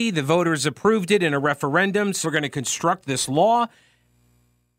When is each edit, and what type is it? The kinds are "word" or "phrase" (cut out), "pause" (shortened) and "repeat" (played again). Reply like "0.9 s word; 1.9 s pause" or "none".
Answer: 2.2 s word